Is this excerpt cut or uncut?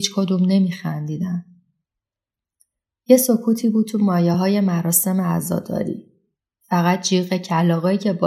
uncut